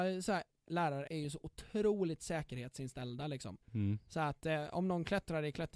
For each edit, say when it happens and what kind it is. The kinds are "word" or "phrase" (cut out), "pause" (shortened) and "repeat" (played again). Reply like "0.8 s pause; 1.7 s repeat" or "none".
1.1 s word; 3.6 s pause